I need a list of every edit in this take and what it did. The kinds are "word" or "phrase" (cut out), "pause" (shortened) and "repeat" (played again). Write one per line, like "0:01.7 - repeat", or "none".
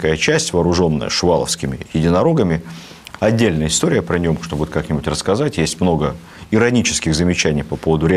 none

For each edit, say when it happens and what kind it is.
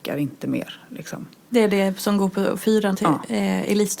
0:02.9 - word

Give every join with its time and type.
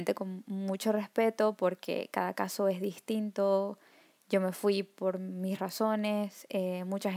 none

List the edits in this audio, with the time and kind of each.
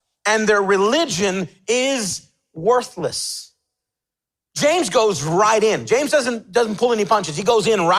none

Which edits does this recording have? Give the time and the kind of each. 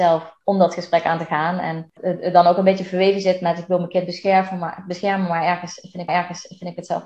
0:02.0 - word
0:06.1 - repeat

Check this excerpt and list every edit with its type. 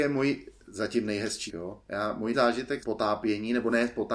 0:01.5 - word
0:02.3 - word
0:02.8 - word

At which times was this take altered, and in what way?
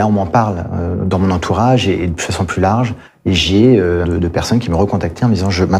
0:03.1 - pause
0:04.0 - phrase

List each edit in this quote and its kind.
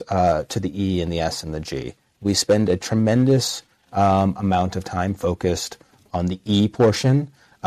none

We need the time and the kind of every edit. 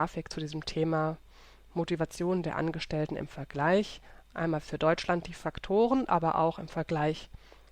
none

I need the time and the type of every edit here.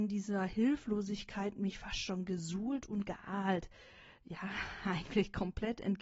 none

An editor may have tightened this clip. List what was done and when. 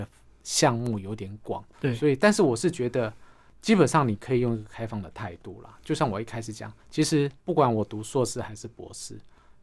0:01.7 - pause
0:06.8 - pause
0:07.4 - pause

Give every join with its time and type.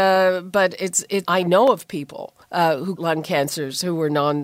0:01.2 - phrase
0:02.4 - pause
0:03.0 - word

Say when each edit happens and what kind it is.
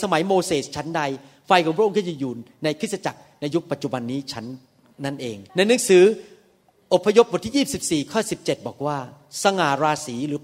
0:05.5 - pause

